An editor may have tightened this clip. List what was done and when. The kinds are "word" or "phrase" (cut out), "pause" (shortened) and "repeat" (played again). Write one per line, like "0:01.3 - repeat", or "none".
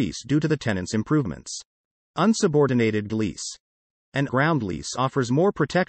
0:03.1 - word
0:04.3 - word